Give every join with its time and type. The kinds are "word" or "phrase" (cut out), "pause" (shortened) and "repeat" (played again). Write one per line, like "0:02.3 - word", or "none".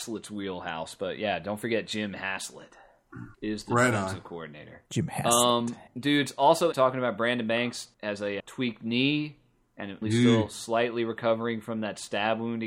0:03.3 - pause
0:04.9 - pause
0:05.9 - pause
0:06.7 - phrase
0:07.9 - pause
0:08.4 - word
0:10.0 - phrase